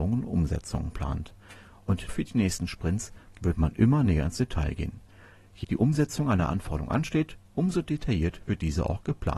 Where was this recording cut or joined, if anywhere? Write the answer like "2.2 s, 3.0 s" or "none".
2.1 s, 5.6 s